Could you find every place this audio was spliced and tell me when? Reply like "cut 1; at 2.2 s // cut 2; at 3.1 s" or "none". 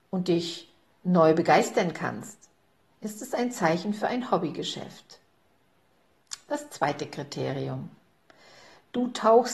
none